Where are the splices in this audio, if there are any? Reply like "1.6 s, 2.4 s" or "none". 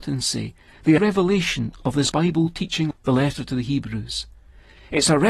1.0 s, 2.1 s, 2.9 s